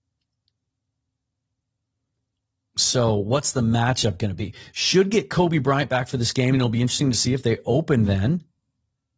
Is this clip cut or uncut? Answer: uncut